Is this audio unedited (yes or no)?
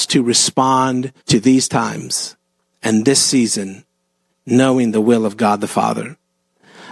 no